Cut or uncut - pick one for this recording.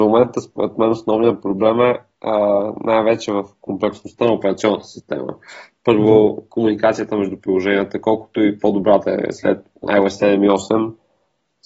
uncut